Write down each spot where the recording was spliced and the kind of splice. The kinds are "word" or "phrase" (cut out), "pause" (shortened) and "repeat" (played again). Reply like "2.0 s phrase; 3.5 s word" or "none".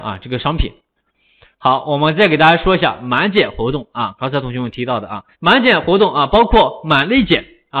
5.3 s pause